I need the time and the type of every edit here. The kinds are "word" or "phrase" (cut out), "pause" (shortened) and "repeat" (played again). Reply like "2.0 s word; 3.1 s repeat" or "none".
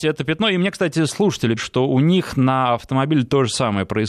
1.6 s word

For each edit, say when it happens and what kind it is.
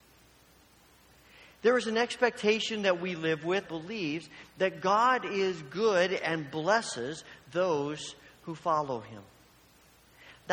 3.6 s word

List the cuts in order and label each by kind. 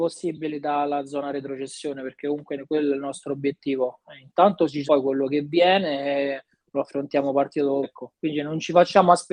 4.9 s word; 7.8 s word

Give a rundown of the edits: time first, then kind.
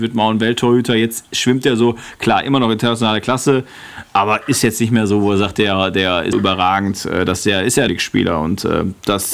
6.3 s word; 7.9 s phrase

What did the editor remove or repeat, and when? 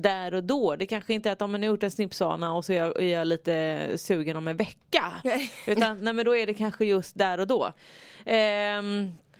none

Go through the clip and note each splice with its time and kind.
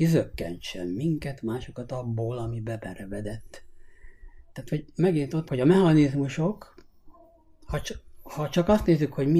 5.5 s word

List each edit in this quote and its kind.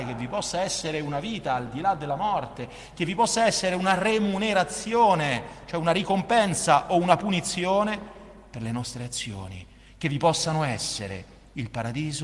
none

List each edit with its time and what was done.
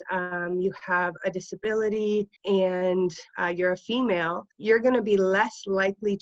2.4 s pause; 4.5 s pause

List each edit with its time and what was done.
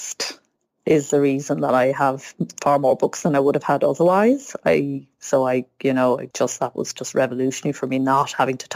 6.3 s pause

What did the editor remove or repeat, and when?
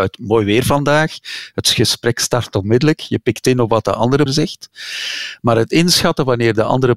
4.3 s word

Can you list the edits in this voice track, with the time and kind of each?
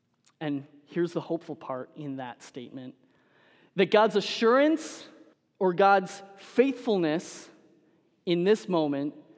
5.3 s pause

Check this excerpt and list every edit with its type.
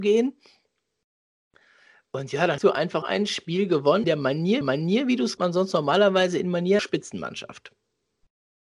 2.6 s word; 3.0 s word; 4.0 s phrase; 4.6 s repeat; 5.4 s phrase; 6.8 s word

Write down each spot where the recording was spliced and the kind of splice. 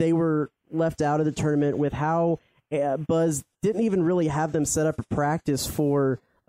3.5 s pause

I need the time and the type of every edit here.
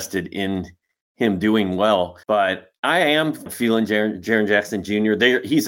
2.2 s pause; 3.5 s word

